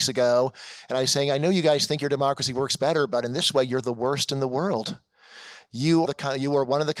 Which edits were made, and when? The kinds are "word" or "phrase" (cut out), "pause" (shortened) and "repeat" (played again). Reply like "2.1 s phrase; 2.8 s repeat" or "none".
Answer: 6.1 s word